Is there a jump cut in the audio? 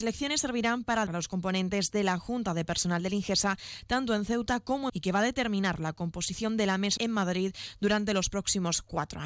yes; 3 cuts; at 1.1 s, 4.9 s, 7.0 s

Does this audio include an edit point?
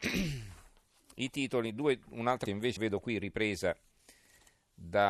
yes; 2 cuts; at 2.5 s, 2.8 s

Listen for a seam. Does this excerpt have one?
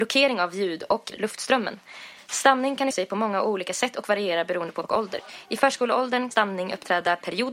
yes; 4 cuts; at 1.1 s, 2.9 s, 4.8 s, 6.3 s

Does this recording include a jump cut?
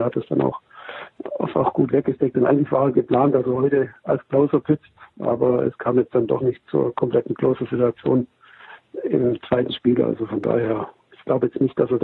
no; 0 cuts

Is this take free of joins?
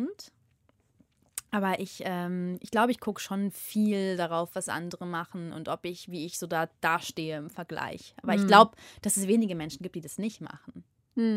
yes; 0 cuts

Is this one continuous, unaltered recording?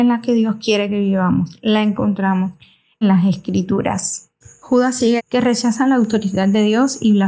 no; 2 cuts; at 3.0 s, 5.2 s

